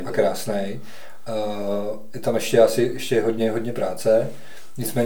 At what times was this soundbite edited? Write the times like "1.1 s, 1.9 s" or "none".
none